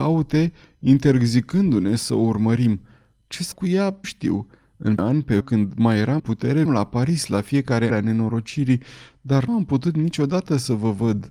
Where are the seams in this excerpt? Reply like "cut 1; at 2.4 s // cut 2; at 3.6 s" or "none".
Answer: cut 1; at 3.5 s // cut 2; at 4.0 s // cut 3; at 5.0 s // cut 4; at 5.4 s // cut 5; at 6.2 s // cut 6; at 6.6 s // cut 7; at 7.9 s // cut 8; at 9.5 s